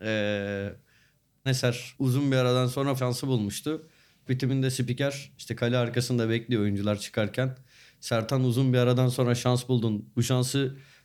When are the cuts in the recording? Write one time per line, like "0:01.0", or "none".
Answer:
0:01.5
0:01.9
0:03.0
0:04.3